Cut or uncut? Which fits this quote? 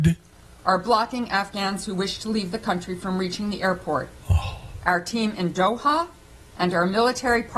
uncut